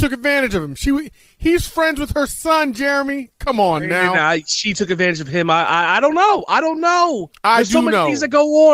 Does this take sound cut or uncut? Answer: cut